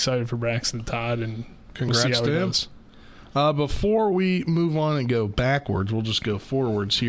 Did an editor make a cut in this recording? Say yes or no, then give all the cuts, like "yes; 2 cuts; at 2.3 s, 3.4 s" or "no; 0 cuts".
no; 0 cuts